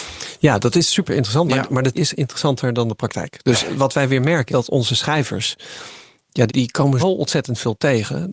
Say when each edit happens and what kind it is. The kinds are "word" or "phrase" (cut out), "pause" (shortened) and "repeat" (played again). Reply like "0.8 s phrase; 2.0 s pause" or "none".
1.9 s word; 4.5 s word; 6.5 s word; 7.0 s word